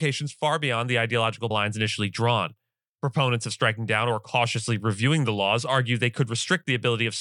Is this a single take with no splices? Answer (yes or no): no